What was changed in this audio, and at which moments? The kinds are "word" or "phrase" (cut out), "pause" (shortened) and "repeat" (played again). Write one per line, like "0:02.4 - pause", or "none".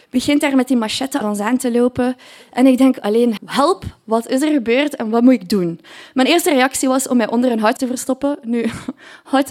0:01.2 - word
0:03.4 - word
0:07.8 - word